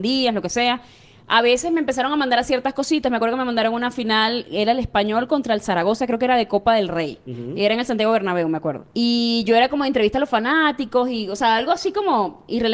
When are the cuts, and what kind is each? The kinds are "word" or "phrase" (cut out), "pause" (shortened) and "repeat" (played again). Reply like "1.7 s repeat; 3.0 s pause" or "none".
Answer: 8.9 s pause